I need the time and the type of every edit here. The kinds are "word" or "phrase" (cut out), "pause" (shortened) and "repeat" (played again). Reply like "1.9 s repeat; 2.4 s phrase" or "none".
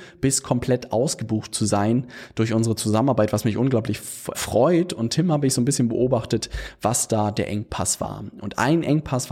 4.3 s word

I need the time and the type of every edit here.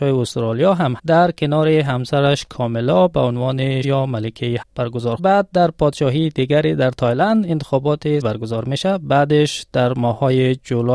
1.0 s word; 3.8 s word; 4.6 s word; 5.2 s phrase; 8.2 s word

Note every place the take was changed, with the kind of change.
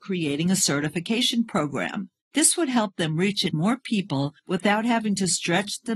3.5 s word; 4.4 s pause

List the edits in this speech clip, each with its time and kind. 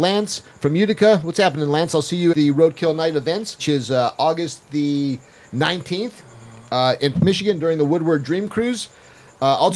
2.3 s word; 3.6 s word; 7.1 s word

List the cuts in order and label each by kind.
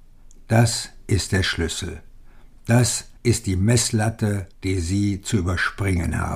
3.2 s pause; 4.5 s pause

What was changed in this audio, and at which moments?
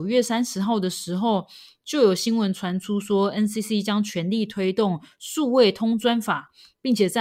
none

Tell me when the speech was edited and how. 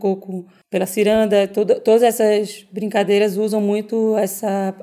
none

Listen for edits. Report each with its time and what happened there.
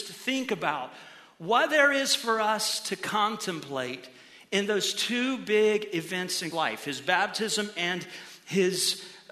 6.5 s word

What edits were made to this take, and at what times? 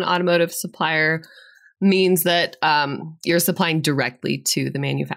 none

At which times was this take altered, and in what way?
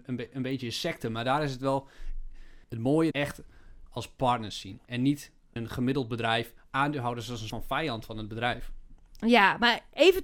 2.6 s pause; 3.1 s phrase; 3.9 s word; 4.8 s pause; 5.6 s word; 7.5 s word

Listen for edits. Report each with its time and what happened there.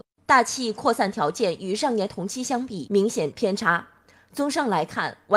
none

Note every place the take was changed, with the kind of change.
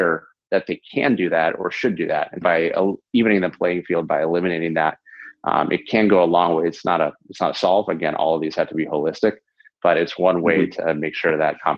2.4 s word

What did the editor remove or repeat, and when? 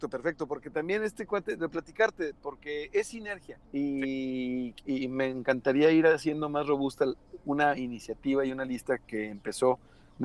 1.7 s word; 3.6 s pause

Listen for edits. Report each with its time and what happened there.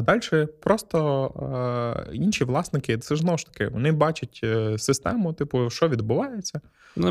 none

